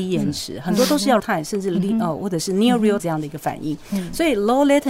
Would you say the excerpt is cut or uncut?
cut